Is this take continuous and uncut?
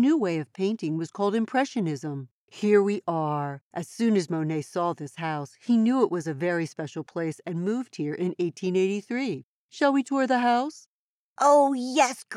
yes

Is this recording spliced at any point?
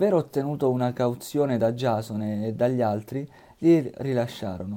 no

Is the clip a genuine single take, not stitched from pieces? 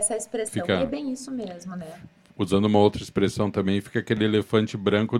yes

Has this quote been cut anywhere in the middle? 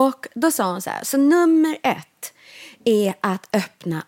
no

